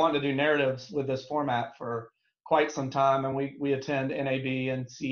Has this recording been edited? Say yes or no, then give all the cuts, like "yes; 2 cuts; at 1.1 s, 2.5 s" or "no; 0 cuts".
no; 0 cuts